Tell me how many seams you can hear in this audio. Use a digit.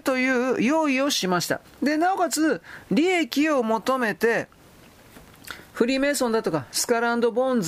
1